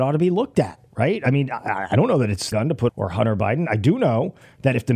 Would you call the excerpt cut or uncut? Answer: cut